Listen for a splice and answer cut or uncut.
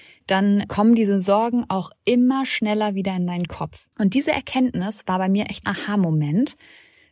cut